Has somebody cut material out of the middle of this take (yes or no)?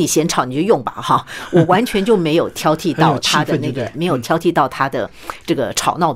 yes